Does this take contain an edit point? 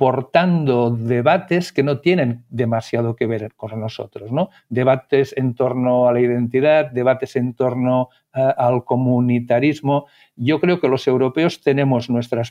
no; 0 cuts

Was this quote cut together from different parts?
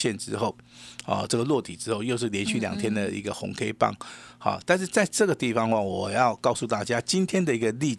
no; 0 cuts

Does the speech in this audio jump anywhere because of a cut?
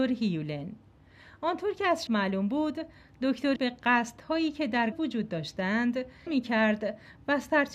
yes; 4 cuts; at 2.1 s, 3.6 s, 4.9 s, 6.3 s

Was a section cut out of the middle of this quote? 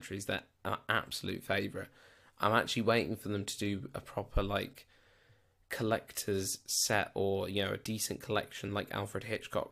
no; 0 cuts

